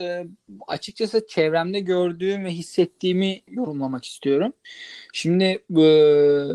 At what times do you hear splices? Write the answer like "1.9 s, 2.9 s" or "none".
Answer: 3.5 s